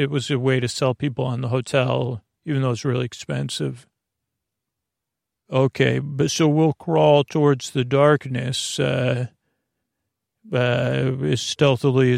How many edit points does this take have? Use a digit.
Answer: 0